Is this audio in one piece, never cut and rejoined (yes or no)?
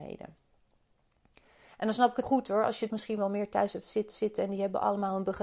no